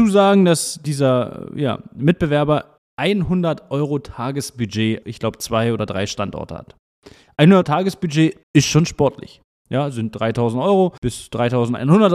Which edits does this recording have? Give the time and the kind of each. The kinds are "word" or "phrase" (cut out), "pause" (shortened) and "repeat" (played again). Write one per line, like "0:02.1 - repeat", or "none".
0:02.8 - pause
0:05.0 - word
0:07.6 - word
0:08.4 - pause
0:11.0 - pause